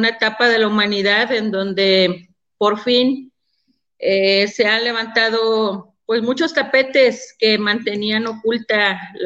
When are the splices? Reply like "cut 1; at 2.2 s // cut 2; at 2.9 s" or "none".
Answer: none